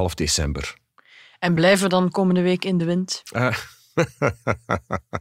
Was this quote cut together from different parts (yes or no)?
no